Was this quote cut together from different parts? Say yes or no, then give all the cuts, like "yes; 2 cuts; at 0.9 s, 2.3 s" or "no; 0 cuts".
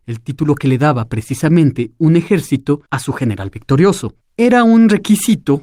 yes; 2 cuts; at 2.9 s, 4.2 s